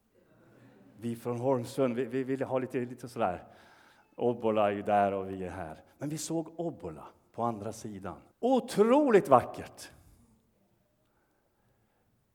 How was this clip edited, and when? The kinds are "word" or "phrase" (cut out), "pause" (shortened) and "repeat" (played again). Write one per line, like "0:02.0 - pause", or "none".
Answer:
0:08.3 - pause